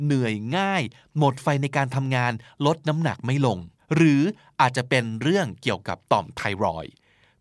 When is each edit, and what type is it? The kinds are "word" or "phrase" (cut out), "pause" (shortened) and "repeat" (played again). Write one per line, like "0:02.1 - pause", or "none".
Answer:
0:03.8 - pause